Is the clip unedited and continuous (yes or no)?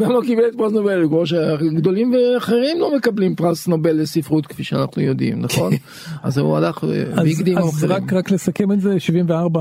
yes